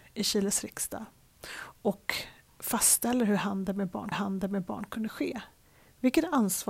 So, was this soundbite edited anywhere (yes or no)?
yes